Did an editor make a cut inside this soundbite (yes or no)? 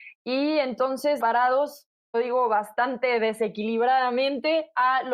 yes